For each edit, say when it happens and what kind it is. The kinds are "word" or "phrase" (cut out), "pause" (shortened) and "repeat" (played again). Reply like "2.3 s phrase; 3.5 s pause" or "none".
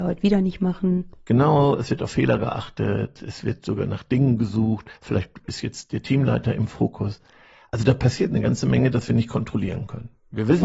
5.0 s pause